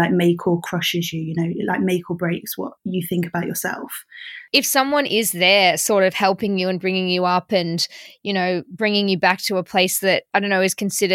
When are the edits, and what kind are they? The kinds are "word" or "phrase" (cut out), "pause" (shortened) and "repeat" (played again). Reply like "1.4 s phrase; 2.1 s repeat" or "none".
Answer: 2.8 s pause